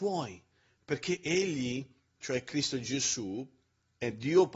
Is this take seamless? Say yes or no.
yes